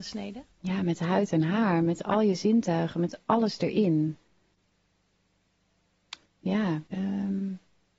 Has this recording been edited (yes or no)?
yes